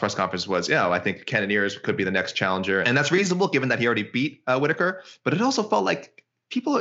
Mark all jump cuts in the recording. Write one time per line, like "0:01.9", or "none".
0:02.8

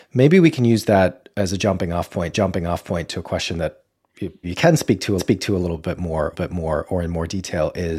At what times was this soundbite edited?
0:02.3
0:04.4
0:05.2
0:06.3

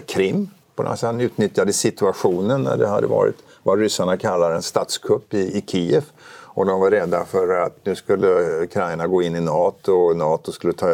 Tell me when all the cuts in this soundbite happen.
none

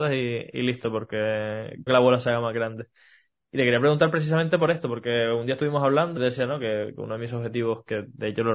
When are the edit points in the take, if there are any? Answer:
0:01.9
0:06.2

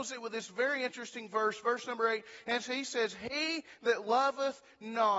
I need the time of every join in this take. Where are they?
none

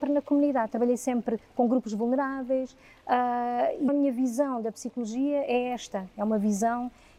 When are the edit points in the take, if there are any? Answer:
0:03.9

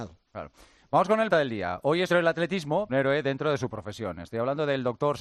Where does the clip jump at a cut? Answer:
0:01.3
0:02.1
0:02.9

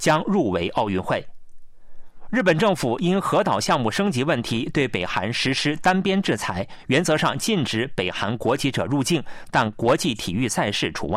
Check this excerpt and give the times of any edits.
none

